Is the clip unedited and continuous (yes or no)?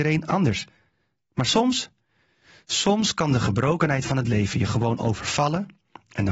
yes